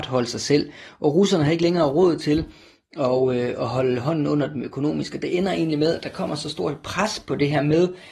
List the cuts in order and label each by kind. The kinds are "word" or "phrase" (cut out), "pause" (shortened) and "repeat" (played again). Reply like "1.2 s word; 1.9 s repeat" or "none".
none